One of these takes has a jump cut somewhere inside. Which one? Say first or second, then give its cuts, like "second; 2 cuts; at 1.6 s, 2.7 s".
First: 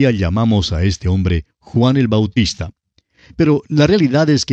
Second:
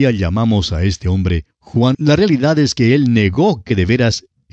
second; 1 cut; at 1.9 s